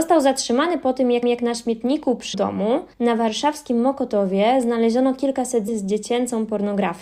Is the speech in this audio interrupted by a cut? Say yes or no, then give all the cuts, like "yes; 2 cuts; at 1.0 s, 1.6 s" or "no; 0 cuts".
yes; 4 cuts; at 1.2 s, 2.3 s, 2.9 s, 5.7 s